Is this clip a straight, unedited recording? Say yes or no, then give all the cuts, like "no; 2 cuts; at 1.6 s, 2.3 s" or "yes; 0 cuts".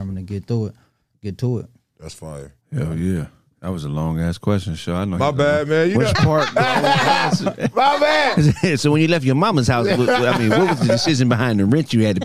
no; 1 cut; at 2.6 s